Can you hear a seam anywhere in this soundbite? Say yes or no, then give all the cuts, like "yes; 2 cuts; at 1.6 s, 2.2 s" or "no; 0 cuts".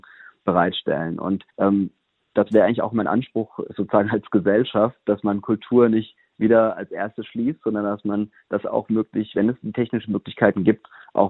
yes; 1 cut; at 1.5 s